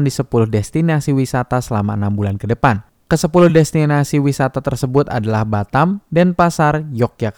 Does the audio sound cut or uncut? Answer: uncut